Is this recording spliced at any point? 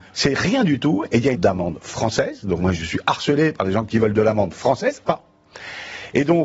yes; 2 cuts; at 1.3 s, 5.0 s

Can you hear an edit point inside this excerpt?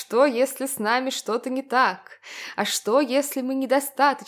no; 0 cuts

